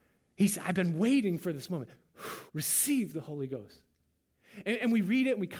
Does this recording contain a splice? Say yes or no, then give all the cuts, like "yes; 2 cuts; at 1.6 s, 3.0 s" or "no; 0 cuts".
yes; 1 cut; at 2.5 s